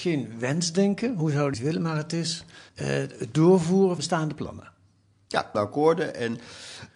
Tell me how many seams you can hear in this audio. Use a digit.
4